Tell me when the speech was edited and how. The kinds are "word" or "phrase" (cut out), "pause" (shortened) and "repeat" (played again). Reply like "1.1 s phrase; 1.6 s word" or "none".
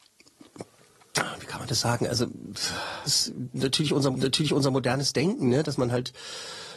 3.1 s word; 4.1 s repeat